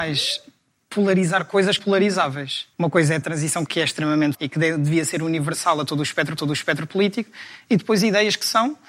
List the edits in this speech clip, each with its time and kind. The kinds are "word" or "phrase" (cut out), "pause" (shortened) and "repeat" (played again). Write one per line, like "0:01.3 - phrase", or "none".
0:01.8 - phrase
0:02.7 - pause
0:03.2 - phrase
0:03.7 - word
0:04.3 - word
0:06.4 - repeat